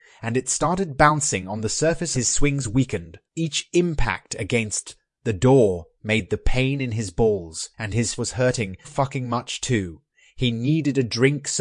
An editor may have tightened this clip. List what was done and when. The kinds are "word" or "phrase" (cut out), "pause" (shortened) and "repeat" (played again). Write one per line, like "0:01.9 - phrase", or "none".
0:02.1 - phrase
0:03.3 - pause
0:07.7 - word
0:08.2 - word
0:08.8 - word

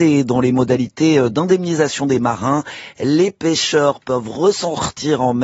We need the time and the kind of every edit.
none

